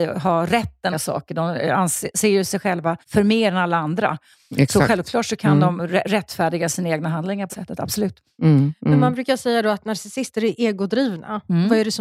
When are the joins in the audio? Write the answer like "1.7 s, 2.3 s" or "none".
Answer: 0.9 s, 3.0 s, 7.5 s